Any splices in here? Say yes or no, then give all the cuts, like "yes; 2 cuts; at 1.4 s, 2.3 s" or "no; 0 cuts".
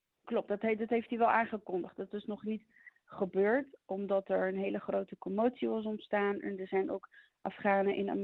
no; 0 cuts